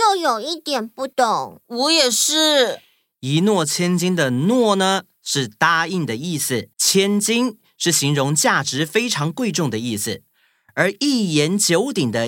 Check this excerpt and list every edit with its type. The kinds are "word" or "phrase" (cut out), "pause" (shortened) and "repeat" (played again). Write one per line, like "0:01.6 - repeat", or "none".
0:01.1 - pause
0:06.7 - pause